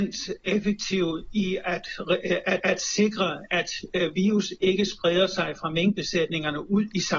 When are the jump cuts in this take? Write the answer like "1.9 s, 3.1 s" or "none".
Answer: 2.6 s